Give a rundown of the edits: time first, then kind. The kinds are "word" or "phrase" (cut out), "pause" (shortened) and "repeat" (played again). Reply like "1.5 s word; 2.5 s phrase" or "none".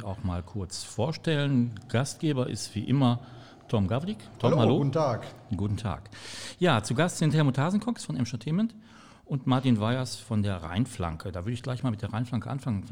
none